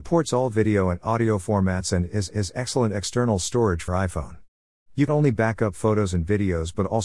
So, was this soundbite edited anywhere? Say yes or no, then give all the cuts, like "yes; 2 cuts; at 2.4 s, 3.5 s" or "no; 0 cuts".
yes; 3 cuts; at 2.3 s, 3.9 s, 5.1 s